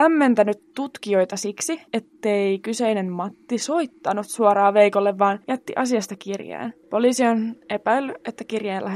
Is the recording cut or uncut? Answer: cut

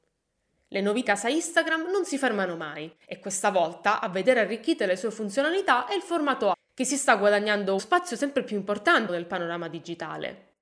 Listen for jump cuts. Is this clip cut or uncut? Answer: cut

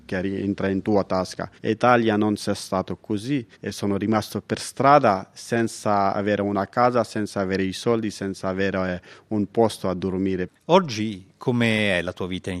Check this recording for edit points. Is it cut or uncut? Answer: cut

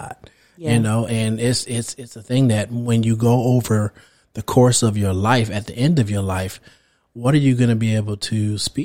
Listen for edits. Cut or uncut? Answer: uncut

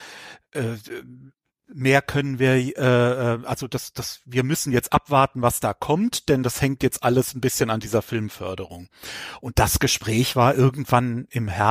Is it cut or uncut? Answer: uncut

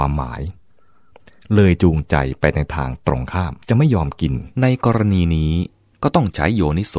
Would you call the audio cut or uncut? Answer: cut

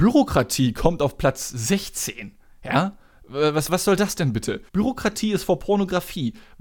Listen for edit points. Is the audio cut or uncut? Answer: cut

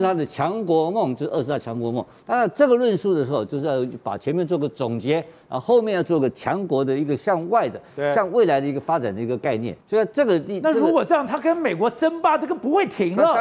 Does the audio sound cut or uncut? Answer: cut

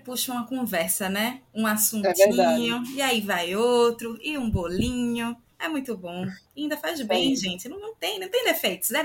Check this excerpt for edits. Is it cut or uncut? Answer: cut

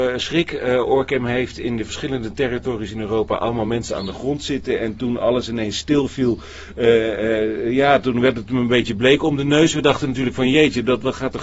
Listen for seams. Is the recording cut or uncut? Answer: uncut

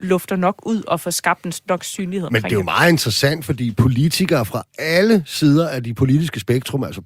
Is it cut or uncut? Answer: uncut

